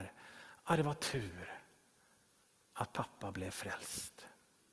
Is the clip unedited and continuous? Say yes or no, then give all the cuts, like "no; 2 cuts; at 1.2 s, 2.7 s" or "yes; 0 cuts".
yes; 0 cuts